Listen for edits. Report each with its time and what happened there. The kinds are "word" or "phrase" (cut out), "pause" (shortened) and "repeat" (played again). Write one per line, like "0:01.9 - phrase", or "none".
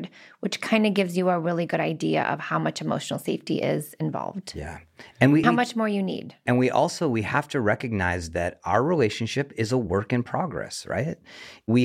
0:05.4 - word